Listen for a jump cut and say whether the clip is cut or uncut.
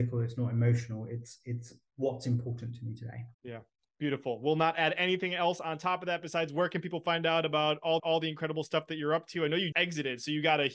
cut